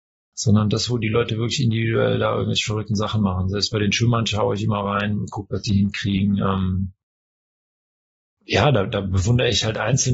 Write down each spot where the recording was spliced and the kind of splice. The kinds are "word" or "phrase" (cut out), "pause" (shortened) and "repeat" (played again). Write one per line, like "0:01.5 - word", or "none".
none